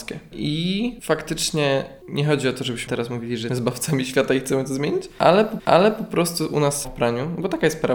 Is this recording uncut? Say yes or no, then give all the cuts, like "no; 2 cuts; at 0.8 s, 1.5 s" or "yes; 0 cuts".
no; 4 cuts; at 2.9 s, 3.5 s, 5.6 s, 6.8 s